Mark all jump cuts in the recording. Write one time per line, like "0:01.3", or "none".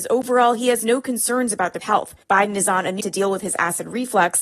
0:01.8
0:02.2
0:03.0